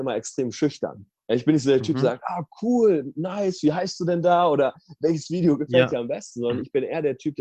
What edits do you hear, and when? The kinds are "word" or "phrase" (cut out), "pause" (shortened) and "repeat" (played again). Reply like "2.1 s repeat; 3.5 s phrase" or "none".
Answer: 1.2 s pause